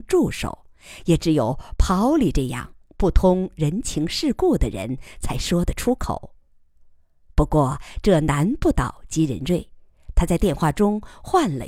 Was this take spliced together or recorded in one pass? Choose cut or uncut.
uncut